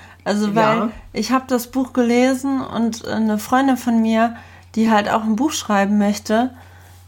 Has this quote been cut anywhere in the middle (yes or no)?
no